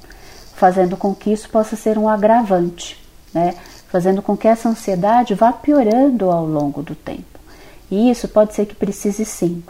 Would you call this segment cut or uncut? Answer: uncut